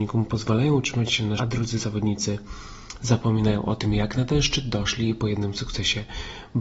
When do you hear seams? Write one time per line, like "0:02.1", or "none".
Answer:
0:01.4